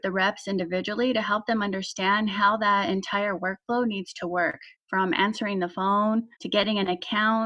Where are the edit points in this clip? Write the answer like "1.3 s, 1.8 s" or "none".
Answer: 4.7 s, 6.3 s